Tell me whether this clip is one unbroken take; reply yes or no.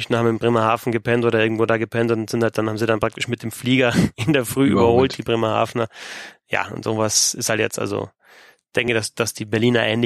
yes